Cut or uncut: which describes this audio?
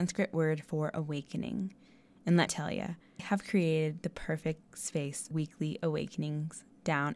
cut